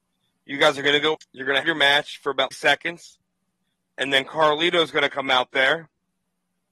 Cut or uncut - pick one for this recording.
cut